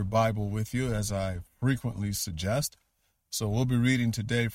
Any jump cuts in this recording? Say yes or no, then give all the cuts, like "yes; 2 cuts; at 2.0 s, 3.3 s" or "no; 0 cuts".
no; 0 cuts